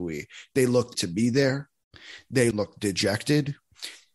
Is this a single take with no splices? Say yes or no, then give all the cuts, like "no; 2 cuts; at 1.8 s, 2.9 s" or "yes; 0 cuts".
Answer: no; 2 cuts; at 0.9 s, 2.5 s